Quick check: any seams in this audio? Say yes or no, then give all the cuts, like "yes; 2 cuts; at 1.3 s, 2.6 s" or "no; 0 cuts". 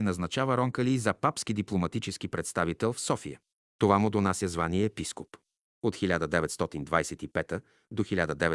no; 0 cuts